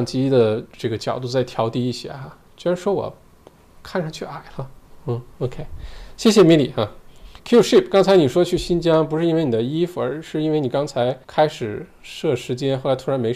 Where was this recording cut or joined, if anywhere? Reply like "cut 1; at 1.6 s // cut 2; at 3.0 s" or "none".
cut 1; at 7.4 s // cut 2; at 11.2 s